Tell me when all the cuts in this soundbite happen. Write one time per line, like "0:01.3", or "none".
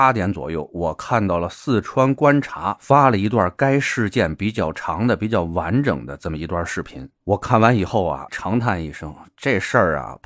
0:08.3